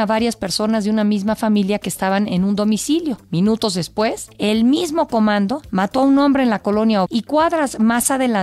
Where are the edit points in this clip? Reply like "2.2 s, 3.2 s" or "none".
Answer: 7.1 s